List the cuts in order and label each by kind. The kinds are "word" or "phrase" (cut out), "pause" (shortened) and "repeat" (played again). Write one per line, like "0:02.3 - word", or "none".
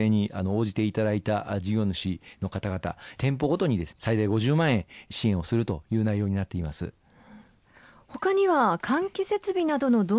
0:03.9 - word